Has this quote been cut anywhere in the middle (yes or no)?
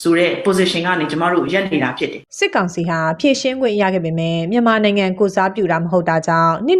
yes